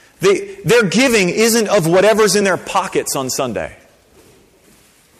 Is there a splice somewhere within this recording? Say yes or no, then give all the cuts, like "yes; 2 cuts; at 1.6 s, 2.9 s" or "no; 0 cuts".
no; 0 cuts